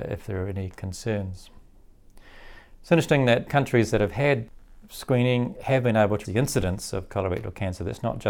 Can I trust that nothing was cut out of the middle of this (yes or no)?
no